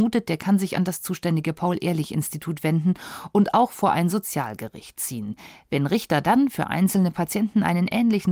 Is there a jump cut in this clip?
no; 0 cuts

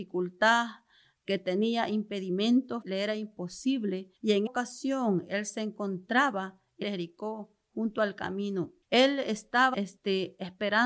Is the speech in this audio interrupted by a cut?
yes; 6 cuts; at 2.8 s, 4.2 s, 4.5 s, 6.8 s, 8.8 s, 9.7 s

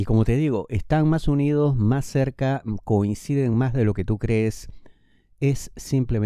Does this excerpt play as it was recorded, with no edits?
yes; 0 cuts

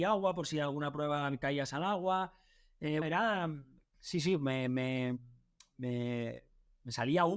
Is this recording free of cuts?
no; 1 cut; at 3.0 s

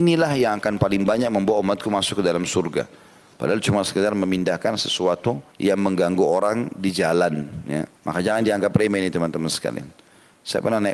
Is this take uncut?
no; 2 cuts; at 5.5 s, 7.9 s

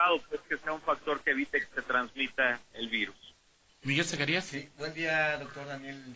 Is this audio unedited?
yes; 0 cuts

